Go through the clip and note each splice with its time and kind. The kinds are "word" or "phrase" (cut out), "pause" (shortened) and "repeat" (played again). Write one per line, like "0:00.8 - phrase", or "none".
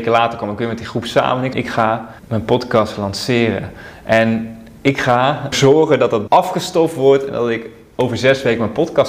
0:01.5 - phrase
0:02.2 - pause
0:05.5 - word
0:06.3 - word